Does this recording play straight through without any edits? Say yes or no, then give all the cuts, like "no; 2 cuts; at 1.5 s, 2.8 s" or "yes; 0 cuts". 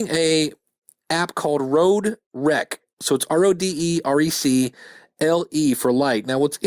yes; 0 cuts